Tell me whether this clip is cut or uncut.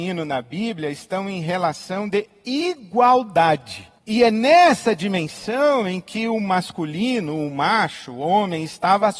cut